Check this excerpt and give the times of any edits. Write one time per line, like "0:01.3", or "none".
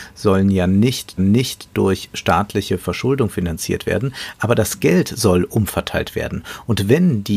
0:01.2